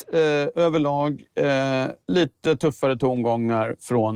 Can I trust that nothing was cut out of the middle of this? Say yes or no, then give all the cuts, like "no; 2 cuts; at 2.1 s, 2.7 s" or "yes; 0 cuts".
no; 1 cut; at 2.0 s